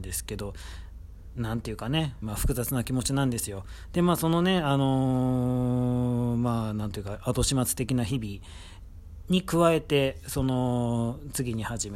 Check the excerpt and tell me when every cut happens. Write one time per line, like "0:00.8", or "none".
0:02.2